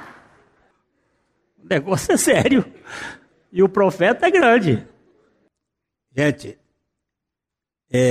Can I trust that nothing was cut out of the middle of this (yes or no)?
yes